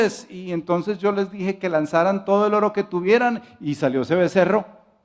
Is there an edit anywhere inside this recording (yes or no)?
no